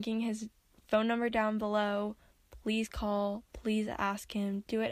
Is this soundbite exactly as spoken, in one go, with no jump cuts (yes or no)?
yes